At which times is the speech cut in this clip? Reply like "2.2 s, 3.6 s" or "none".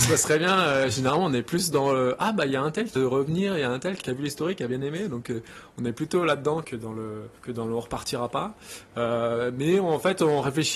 3.0 s, 4.0 s, 6.6 s, 7.4 s